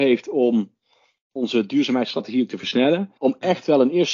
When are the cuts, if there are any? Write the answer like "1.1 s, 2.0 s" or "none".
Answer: 3.2 s